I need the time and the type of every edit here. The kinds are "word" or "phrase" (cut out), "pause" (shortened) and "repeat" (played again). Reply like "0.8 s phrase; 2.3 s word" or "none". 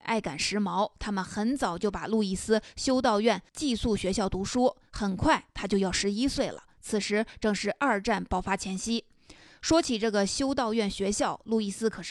3.5 s pause